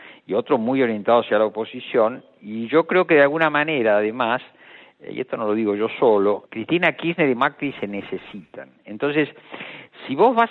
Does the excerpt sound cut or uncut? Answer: cut